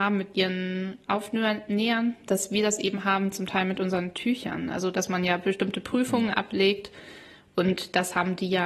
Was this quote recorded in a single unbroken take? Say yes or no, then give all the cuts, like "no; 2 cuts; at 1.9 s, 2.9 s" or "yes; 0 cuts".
yes; 0 cuts